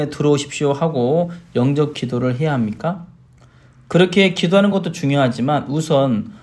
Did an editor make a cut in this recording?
no; 0 cuts

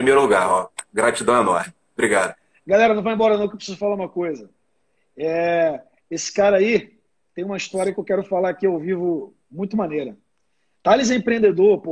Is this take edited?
no; 0 cuts

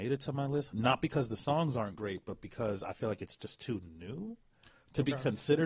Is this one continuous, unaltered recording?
yes; 0 cuts

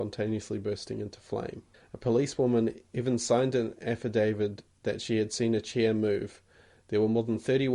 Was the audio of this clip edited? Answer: yes; 1 cut; at 1.7 s

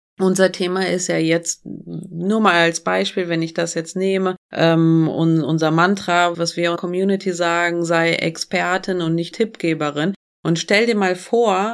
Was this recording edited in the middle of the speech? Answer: yes; 4 cuts; at 4.4 s, 6.3 s, 6.8 s, 9.3 s

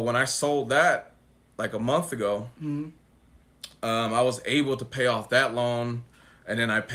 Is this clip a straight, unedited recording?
yes; 0 cuts

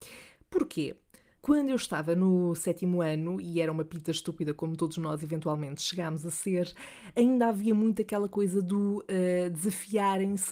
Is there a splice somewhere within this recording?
no; 0 cuts

